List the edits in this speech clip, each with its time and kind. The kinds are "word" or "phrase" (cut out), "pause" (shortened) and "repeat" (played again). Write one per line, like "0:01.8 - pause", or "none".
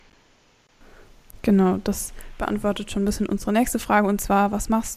none